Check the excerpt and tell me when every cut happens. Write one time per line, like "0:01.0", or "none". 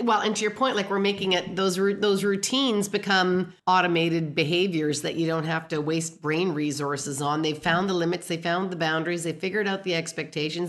0:03.6